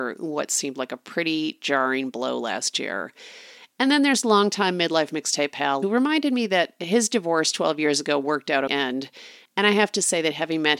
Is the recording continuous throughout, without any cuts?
no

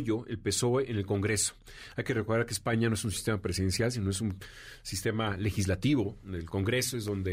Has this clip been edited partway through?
no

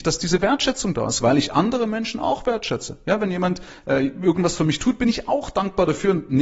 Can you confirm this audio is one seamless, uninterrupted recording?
yes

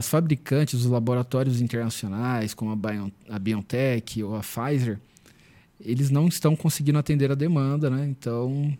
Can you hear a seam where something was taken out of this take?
no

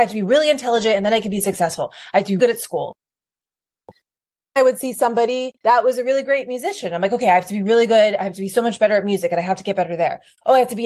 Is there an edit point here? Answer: yes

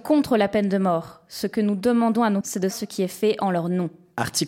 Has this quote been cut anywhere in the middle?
yes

